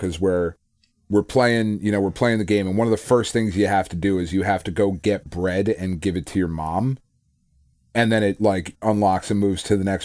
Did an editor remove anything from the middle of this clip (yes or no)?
no